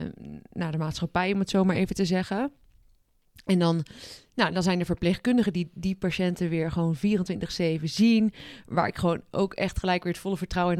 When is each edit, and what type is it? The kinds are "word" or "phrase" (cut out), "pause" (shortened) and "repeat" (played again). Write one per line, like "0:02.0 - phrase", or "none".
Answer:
none